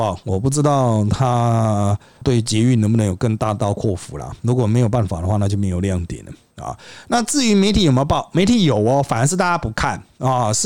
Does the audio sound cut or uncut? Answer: uncut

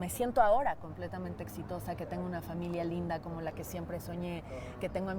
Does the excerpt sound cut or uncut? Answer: uncut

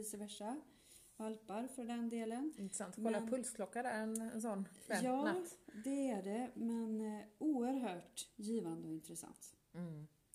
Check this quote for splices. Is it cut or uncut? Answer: uncut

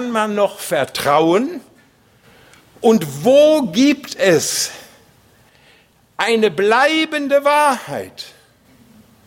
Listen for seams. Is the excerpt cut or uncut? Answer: uncut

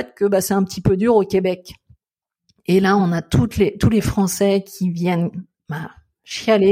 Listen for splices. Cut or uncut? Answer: uncut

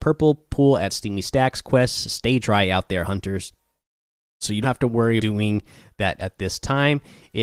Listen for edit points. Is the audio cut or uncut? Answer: cut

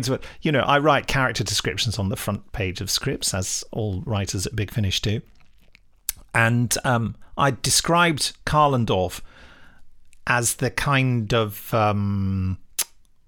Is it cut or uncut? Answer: uncut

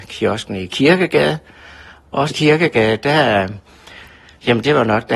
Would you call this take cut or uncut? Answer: cut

